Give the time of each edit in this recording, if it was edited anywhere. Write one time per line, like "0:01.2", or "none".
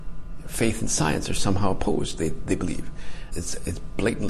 0:03.3